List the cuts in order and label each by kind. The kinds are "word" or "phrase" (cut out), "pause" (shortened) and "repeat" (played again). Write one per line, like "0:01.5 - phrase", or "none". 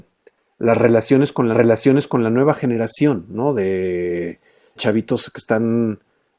0:01.5 - repeat
0:04.8 - word